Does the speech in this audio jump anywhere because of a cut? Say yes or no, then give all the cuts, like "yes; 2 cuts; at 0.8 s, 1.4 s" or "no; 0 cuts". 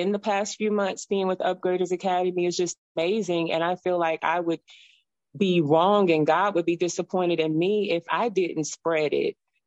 no; 0 cuts